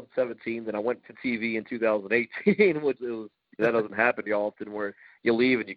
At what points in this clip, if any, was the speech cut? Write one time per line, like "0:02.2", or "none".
0:01.0
0:03.0
0:03.6
0:04.3